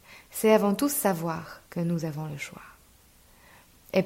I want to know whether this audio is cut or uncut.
cut